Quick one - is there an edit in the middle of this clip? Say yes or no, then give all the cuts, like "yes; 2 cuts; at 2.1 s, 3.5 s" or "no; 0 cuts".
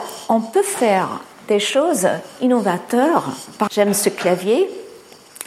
yes; 1 cut; at 3.7 s